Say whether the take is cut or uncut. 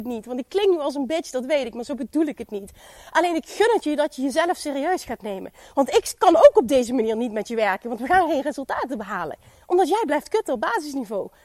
uncut